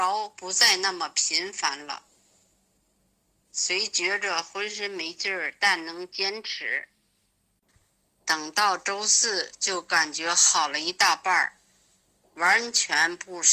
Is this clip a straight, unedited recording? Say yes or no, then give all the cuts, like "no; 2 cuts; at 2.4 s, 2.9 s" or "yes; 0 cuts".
yes; 0 cuts